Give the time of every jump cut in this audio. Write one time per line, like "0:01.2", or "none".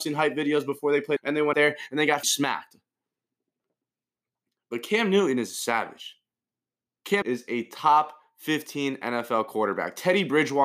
0:01.2
0:01.5
0:02.2
0:07.2